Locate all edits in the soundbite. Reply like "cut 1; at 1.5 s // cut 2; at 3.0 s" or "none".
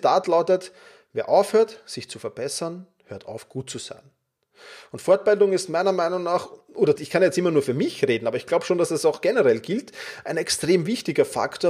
cut 1; at 7.0 s